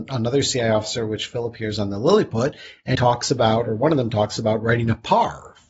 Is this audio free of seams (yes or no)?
no